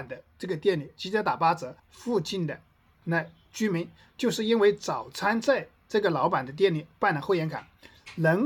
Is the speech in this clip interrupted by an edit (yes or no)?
yes